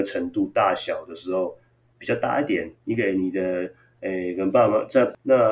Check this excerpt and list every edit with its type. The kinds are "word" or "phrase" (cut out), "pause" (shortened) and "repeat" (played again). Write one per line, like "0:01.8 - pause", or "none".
0:02.8 - pause